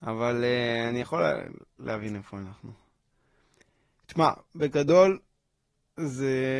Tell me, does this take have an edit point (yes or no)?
no